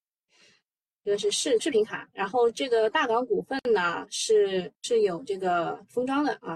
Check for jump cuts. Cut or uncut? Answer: cut